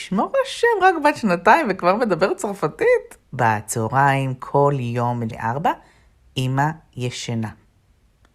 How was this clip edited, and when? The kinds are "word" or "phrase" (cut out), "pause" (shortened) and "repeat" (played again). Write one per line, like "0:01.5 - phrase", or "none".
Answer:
0:03.2 - pause
0:05.3 - word